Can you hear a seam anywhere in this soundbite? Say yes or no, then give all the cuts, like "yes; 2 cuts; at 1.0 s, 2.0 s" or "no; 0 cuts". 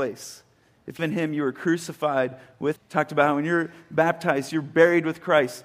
yes; 2 cuts; at 1.0 s, 2.8 s